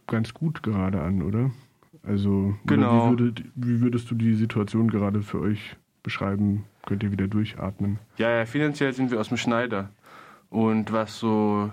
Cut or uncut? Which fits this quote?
uncut